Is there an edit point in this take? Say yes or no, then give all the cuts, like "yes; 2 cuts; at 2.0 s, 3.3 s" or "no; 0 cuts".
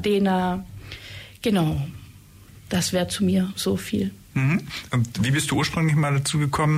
no; 0 cuts